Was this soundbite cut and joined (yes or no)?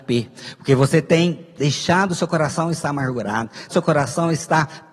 yes